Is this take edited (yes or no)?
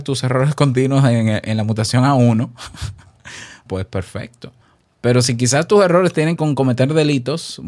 yes